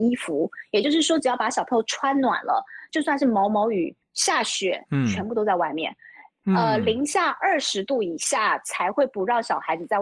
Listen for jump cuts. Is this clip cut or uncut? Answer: uncut